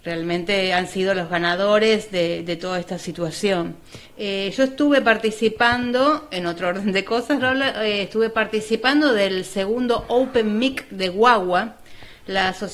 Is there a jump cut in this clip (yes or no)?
yes